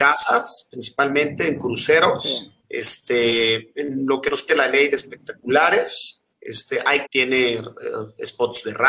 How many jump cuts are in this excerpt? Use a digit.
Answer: 4